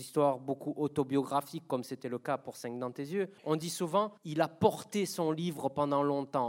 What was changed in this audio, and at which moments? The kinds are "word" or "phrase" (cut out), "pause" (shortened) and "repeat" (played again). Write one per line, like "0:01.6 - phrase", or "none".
0:03.4 - pause
0:04.2 - pause